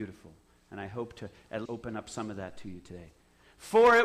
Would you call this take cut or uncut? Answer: cut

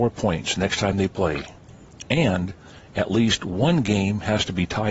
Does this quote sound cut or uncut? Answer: uncut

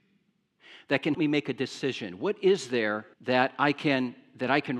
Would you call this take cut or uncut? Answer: cut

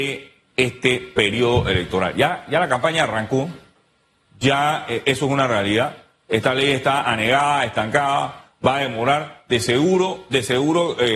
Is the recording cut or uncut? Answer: uncut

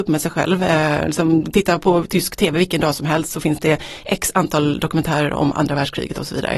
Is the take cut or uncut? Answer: uncut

